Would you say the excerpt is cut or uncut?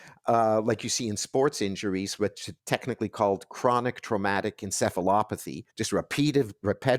cut